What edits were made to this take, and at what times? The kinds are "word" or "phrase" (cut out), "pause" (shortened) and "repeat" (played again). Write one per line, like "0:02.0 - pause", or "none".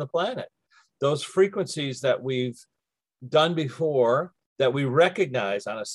none